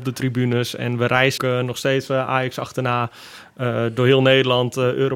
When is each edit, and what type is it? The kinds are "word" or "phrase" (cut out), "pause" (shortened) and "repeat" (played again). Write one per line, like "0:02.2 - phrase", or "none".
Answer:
0:01.4 - word